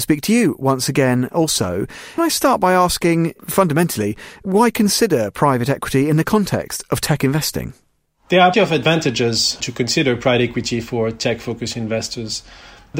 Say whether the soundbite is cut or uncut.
cut